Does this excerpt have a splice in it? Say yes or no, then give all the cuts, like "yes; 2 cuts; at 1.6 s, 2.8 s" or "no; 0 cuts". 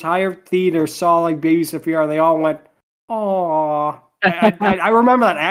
no; 0 cuts